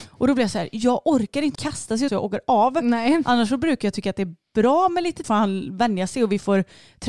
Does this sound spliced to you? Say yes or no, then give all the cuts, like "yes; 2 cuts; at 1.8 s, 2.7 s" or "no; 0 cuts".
yes; 3 cuts; at 1.5 s, 2.1 s, 5.2 s